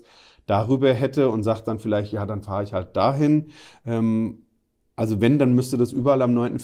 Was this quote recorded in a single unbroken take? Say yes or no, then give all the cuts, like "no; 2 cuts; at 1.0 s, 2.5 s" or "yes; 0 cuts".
yes; 0 cuts